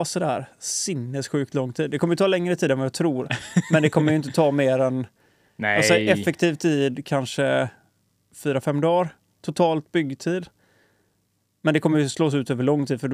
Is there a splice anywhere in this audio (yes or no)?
no